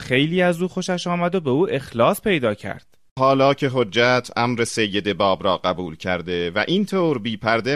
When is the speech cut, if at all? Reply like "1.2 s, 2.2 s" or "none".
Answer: 3.2 s